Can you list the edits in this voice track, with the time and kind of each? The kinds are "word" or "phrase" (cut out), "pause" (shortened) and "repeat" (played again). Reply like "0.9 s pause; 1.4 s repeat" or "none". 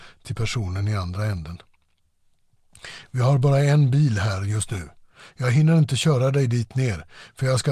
none